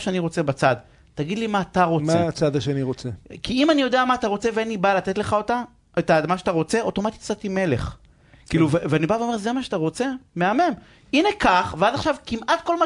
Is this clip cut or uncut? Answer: uncut